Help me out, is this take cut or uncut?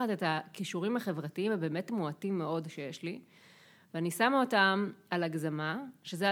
uncut